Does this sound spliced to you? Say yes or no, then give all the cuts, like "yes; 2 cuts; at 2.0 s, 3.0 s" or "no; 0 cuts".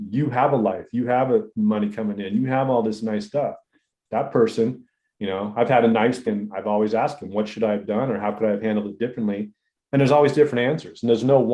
yes; 1 cut; at 6.3 s